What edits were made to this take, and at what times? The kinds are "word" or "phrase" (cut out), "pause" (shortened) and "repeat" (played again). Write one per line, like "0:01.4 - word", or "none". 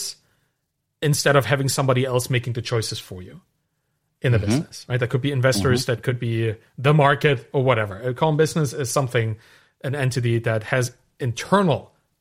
none